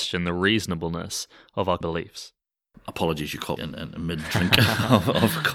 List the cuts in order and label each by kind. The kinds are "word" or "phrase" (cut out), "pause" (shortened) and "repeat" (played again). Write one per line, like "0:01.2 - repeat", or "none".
0:01.8 - word
0:03.6 - word